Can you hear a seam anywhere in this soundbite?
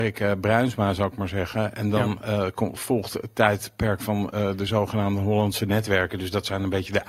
no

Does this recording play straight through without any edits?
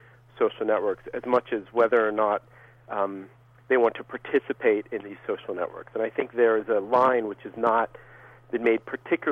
yes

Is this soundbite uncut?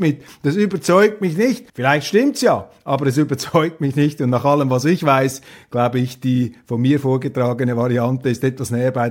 no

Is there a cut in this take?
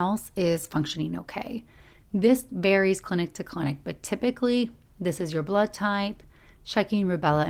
no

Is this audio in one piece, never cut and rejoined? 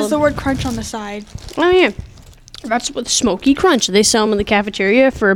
yes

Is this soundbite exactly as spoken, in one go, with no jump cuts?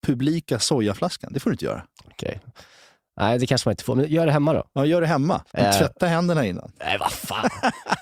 no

